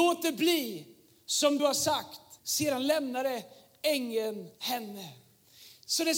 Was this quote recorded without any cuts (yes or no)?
no